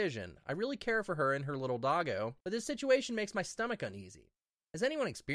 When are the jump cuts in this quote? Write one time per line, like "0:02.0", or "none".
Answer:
0:02.4